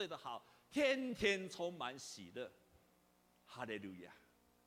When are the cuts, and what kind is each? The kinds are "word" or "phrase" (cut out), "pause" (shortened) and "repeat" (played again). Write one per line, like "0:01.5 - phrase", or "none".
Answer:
none

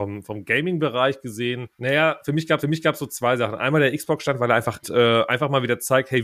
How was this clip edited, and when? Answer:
0:01.7 - pause
0:02.6 - repeat
0:04.8 - phrase

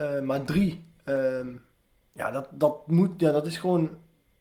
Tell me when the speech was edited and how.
none

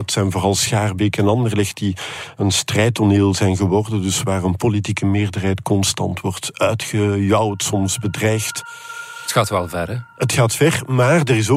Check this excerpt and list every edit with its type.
0:10.1 - pause

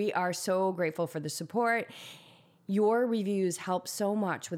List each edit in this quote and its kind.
none

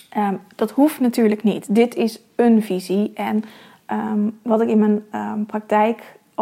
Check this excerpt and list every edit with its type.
none

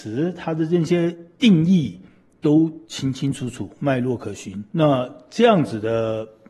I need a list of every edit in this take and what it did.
0:02.8 - pause
0:04.7 - pause

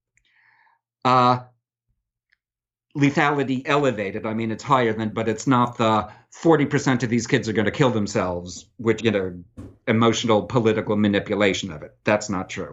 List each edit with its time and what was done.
0:03.6 - word
0:05.1 - word
0:09.0 - phrase

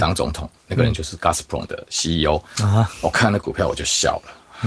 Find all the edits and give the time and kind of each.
none

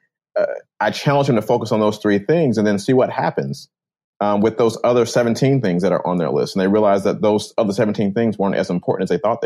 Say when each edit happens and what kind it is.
none

